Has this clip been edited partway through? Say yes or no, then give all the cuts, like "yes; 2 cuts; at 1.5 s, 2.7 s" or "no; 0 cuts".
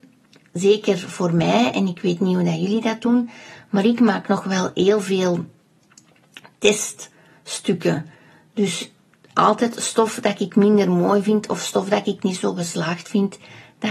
no; 0 cuts